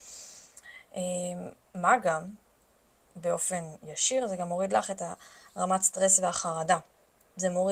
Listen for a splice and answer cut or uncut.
uncut